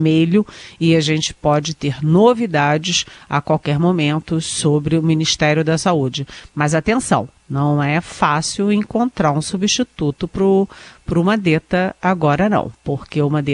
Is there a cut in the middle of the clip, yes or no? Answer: yes